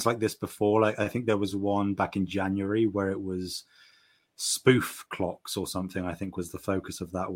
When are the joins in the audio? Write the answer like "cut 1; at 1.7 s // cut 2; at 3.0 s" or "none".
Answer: none

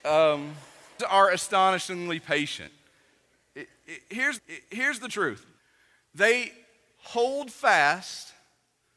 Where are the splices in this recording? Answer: cut 1; at 1.0 s // cut 2; at 4.4 s // cut 3; at 5.6 s

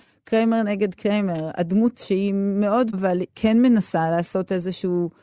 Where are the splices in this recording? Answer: cut 1; at 1.9 s // cut 2; at 2.9 s // cut 3; at 3.3 s

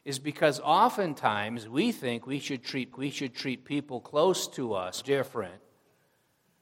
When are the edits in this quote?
cut 1; at 2.9 s // cut 2; at 5.0 s

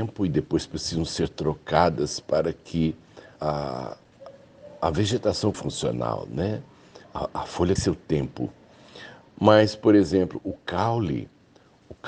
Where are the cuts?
cut 1; at 3.4 s // cut 2; at 5.5 s // cut 3; at 7.0 s // cut 4; at 7.8 s

